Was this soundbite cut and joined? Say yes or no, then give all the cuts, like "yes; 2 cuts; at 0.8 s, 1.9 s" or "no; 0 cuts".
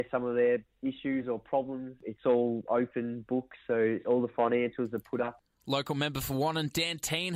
no; 0 cuts